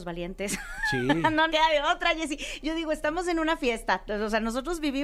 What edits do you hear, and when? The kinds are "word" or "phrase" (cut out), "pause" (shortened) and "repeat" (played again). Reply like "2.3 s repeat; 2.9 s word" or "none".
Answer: 1.5 s word